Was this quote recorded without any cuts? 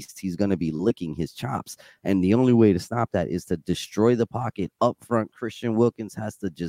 yes; 0 cuts

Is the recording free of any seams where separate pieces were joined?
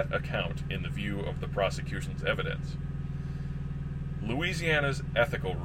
yes; 0 cuts

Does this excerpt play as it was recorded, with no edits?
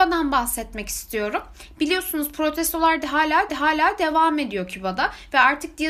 no; 1 cut; at 3.5 s

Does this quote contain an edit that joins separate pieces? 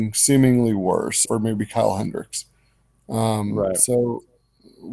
yes; 1 cut; at 1.3 s

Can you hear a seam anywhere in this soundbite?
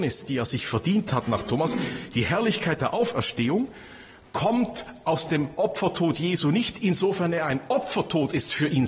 no; 0 cuts

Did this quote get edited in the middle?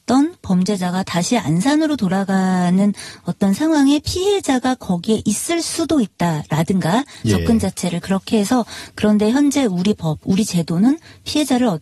no; 0 cuts

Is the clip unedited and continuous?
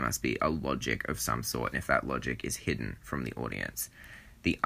no; 1 cut; at 1.7 s

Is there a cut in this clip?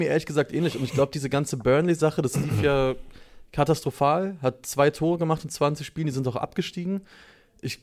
no; 0 cuts

